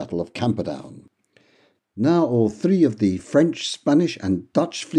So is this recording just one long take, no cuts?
yes; 0 cuts

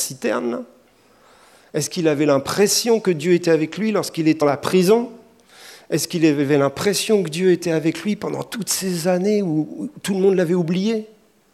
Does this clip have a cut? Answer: yes; 1 cut; at 4.4 s

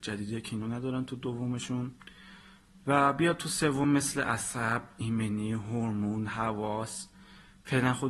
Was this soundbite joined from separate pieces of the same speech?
no; 0 cuts

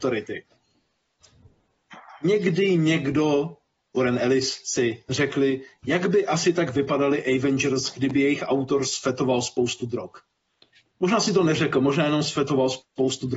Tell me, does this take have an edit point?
no; 0 cuts

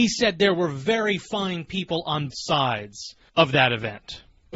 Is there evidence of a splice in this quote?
yes; 1 cut; at 2.3 s

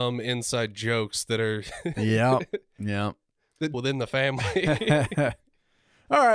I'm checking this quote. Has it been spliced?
yes; 1 cut; at 3.7 s

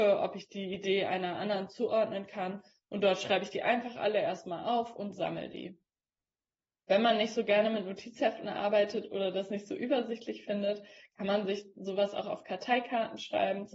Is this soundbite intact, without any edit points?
yes; 0 cuts

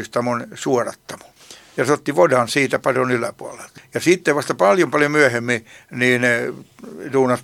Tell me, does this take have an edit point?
no; 0 cuts

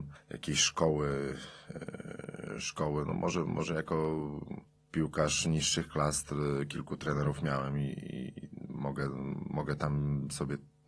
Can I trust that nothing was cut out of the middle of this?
yes; 0 cuts

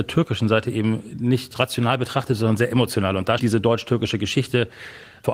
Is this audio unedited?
no; 1 cut; at 3.4 s

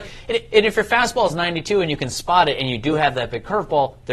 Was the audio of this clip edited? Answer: no; 0 cuts

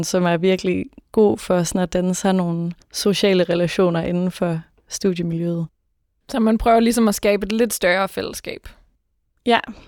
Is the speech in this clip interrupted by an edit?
yes; 1 cut; at 2.8 s

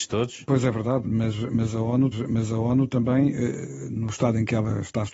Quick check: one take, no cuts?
no; 1 cut; at 2.1 s

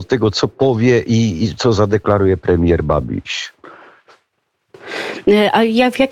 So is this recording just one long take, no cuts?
yes; 0 cuts

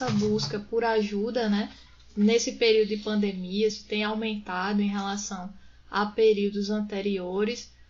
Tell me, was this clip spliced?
no; 0 cuts

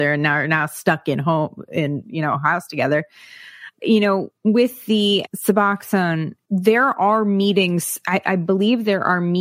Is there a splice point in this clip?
yes; 2 cuts; at 4.3 s, 6.4 s

